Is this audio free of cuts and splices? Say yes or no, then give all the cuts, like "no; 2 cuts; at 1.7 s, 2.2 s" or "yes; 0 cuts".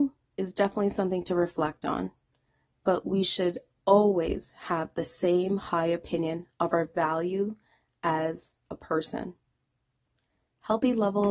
yes; 0 cuts